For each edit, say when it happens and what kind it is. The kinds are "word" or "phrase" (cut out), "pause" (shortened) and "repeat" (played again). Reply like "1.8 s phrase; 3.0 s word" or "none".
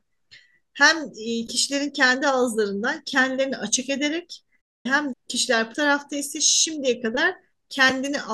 5.1 s word; 5.7 s word